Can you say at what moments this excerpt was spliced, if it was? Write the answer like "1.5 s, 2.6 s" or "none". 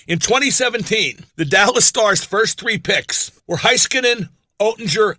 1.3 s, 3.4 s